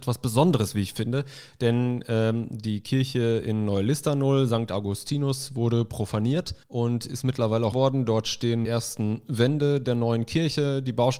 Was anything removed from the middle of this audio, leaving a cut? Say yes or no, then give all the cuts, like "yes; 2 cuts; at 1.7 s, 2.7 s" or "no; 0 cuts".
yes; 3 cuts; at 6.6 s, 7.7 s, 8.6 s